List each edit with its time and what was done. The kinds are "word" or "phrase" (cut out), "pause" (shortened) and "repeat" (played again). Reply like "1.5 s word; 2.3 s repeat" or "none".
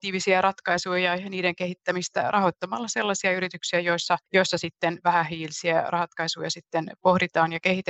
none